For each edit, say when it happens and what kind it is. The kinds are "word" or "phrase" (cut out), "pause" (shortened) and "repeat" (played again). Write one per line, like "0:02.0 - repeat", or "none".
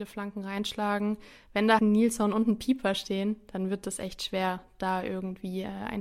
0:01.8 - word